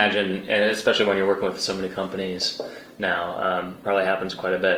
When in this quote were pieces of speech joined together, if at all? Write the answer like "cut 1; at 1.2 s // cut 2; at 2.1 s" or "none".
cut 1; at 3.8 s

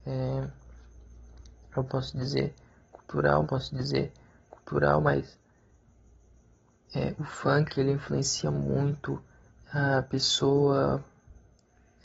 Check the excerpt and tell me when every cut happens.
cut 1; at 3.4 s // cut 2; at 9.5 s

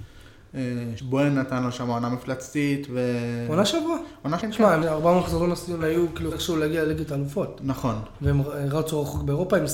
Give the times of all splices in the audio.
cut 1; at 1.0 s // cut 2; at 4.4 s // cut 3; at 4.8 s // cut 4; at 5.8 s // cut 5; at 6.3 s

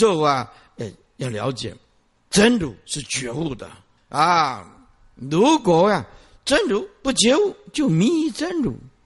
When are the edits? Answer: cut 1; at 4.0 s

